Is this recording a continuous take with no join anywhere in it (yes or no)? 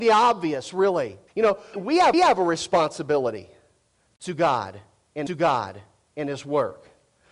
no